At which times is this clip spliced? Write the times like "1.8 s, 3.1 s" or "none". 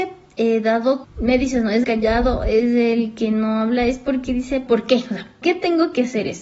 1.0 s, 1.8 s, 4.7 s, 5.4 s